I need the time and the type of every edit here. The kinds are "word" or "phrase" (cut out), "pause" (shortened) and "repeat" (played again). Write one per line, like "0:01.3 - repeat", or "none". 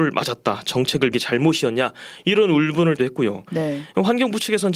0:01.1 - word
0:03.0 - word